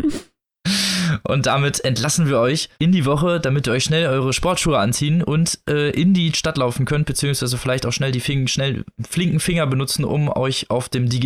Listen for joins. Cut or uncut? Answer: cut